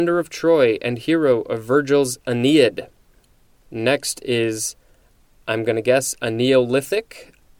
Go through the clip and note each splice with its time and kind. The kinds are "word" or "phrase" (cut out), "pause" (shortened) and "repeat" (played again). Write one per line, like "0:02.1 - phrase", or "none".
none